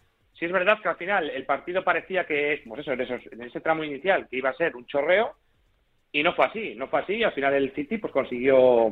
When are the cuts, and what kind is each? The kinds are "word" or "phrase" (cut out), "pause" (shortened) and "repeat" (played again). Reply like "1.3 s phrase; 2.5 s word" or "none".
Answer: none